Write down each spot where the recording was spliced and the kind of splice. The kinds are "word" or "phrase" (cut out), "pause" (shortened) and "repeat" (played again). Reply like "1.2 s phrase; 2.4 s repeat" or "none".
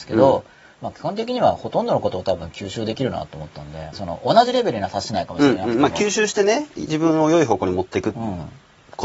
3.9 s phrase